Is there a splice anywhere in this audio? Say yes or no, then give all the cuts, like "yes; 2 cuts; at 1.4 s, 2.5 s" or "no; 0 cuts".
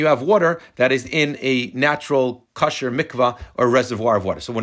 no; 0 cuts